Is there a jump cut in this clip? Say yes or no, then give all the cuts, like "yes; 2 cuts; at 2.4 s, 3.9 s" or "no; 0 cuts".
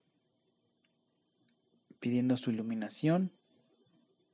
no; 0 cuts